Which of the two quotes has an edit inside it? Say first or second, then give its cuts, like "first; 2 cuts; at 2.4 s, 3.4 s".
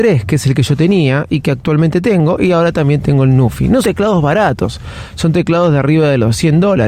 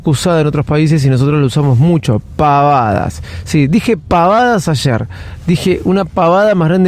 first; 1 cut; at 3.8 s